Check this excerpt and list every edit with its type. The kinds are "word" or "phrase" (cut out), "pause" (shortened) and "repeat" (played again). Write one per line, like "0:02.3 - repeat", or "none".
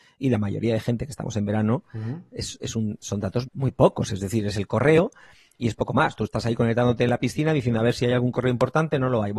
0:03.4 - word

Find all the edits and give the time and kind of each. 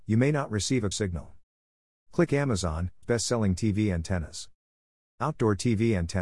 0:00.9 - word
0:03.0 - word

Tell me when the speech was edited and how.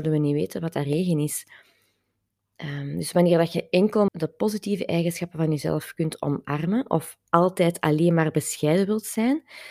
0:04.1 - word

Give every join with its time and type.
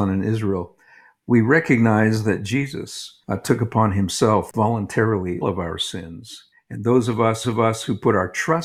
0:03.2 - pause
0:05.4 - word
0:06.5 - pause
0:07.4 - repeat

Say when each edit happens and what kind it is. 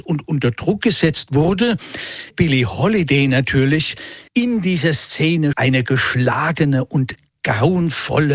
0:02.3 - word
0:04.3 - pause
0:05.5 - word

